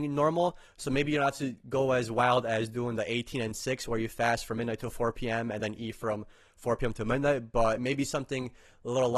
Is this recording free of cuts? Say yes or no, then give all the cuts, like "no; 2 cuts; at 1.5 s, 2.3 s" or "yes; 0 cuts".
yes; 0 cuts